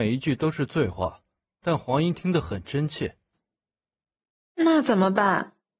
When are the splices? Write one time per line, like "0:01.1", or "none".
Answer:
none

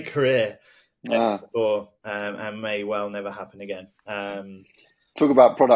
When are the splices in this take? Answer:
none

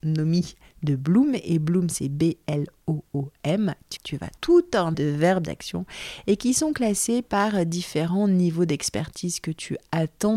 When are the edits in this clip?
0:04.0
0:04.4
0:04.9

